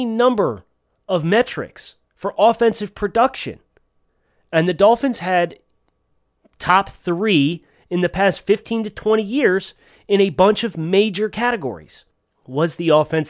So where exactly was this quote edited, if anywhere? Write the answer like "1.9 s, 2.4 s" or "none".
2.0 s